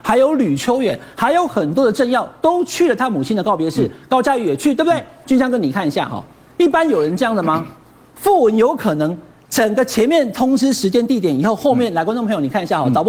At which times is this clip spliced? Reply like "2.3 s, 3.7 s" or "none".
5.2 s